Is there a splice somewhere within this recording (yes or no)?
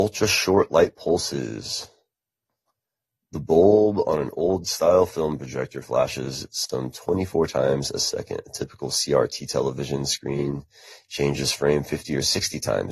no